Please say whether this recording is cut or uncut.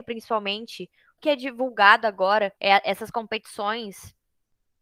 cut